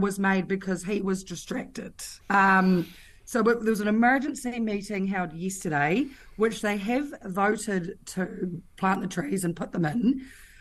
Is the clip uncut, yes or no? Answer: no